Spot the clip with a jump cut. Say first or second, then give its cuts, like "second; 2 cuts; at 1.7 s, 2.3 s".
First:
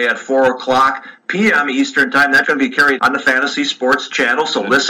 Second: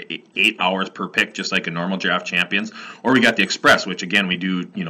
first; 2 cuts; at 2.4 s, 3.0 s